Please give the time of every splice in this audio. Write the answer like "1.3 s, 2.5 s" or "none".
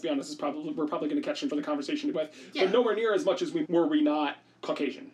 1.5 s, 2.1 s, 3.6 s